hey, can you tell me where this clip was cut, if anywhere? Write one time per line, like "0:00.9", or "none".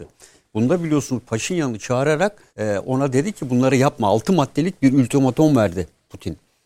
0:02.5

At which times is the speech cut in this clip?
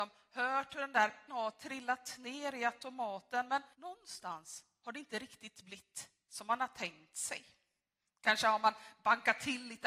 0:01.3
0:03.7
0:04.8

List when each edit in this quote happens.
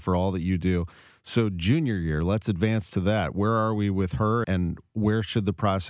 0:04.4

